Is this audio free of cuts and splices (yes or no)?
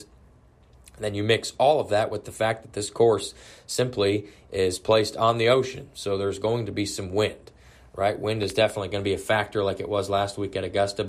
yes